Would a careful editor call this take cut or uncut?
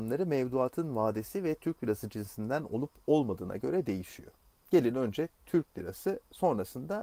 uncut